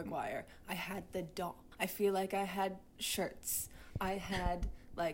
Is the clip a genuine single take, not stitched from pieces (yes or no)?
no